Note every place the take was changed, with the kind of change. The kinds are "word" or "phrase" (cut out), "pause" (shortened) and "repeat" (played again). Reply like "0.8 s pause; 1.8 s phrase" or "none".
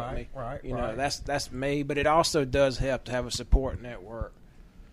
none